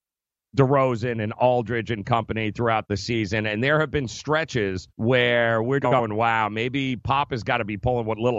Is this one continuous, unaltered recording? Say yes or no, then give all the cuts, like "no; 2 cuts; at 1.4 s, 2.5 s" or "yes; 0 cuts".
no; 2 cuts; at 4.9 s, 5.8 s